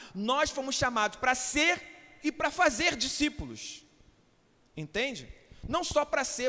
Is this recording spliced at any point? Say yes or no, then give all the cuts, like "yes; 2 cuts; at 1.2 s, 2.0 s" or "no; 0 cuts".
no; 0 cuts